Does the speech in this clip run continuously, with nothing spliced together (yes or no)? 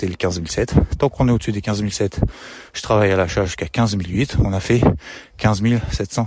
yes